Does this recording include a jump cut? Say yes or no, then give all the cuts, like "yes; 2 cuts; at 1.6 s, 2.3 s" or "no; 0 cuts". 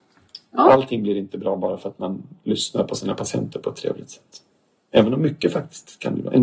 no; 0 cuts